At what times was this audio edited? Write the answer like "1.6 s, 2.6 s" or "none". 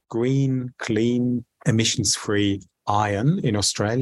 none